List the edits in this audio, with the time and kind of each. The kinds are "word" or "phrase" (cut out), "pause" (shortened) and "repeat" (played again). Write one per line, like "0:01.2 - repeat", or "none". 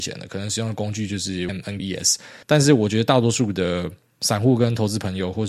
0:01.5 - word
0:01.8 - word
0:02.4 - pause

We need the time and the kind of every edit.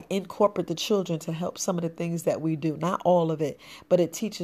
none

